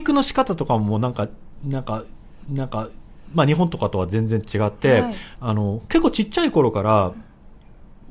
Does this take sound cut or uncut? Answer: cut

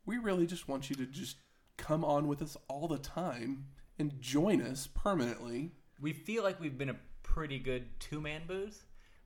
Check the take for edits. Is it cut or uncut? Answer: uncut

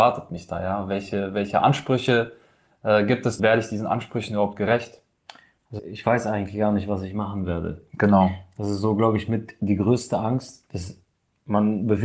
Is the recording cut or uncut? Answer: cut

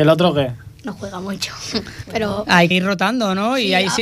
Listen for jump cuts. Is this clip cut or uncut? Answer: cut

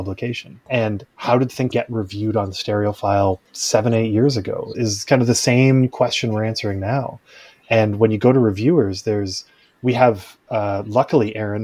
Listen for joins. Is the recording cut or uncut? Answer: cut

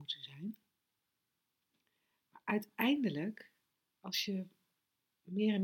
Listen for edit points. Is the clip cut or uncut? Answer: cut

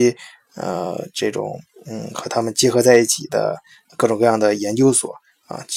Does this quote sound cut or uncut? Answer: uncut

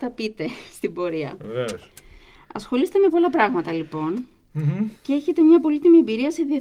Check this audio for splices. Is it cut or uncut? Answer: cut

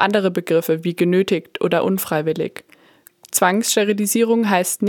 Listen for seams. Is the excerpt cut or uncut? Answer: uncut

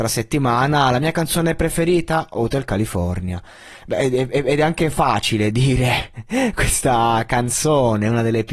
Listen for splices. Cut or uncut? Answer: uncut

